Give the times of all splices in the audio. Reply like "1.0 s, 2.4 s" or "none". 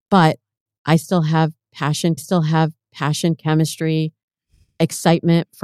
2.2 s